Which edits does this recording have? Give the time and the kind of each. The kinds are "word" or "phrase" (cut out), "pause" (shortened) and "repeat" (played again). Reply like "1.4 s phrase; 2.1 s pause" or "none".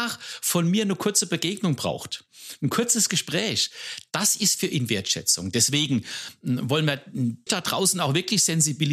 7.5 s word